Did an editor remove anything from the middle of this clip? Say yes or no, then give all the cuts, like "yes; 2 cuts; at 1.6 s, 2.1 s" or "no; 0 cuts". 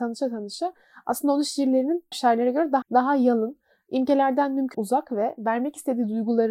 yes; 3 cuts; at 2.1 s, 2.8 s, 4.7 s